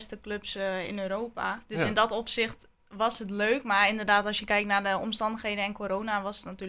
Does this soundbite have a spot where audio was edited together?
yes; 1 cut; at 1.7 s

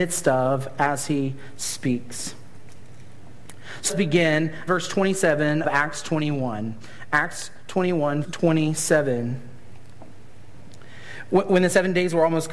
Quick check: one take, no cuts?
no; 4 cuts; at 3.9 s, 4.7 s, 5.6 s, 8.2 s

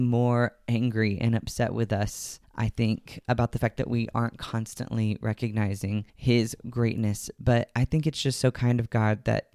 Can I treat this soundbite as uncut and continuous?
no; 2 cuts; at 2.4 s, 6.1 s

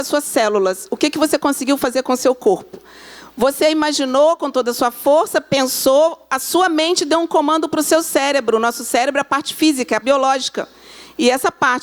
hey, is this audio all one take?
no; 1 cut; at 10.0 s

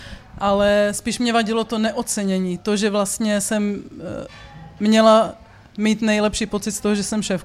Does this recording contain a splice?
no; 0 cuts

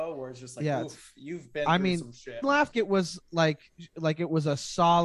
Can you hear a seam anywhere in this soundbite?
yes; 2 cuts; at 2.4 s, 2.7 s

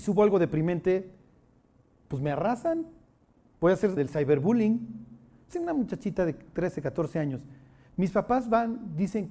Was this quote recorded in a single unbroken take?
no; 2 cuts; at 4.0 s, 5.5 s

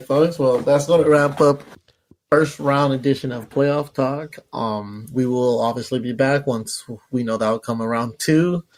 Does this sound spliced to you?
no; 0 cuts

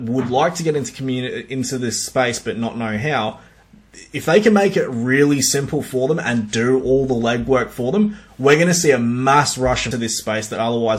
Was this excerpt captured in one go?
no; 1 cut; at 9.9 s

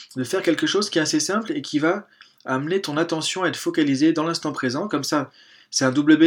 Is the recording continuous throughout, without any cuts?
yes; 0 cuts

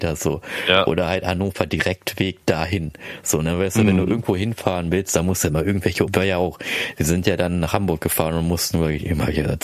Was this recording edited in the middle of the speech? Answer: yes; 1 cut; at 6.1 s

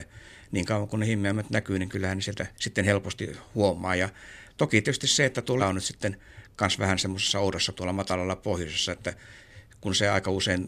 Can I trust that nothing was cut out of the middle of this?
no; 3 cuts; at 2.5 s, 5.6 s, 7.7 s

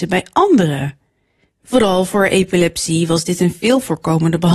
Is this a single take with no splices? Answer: yes; 0 cuts

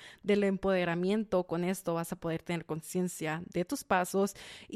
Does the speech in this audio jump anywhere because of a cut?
no; 0 cuts

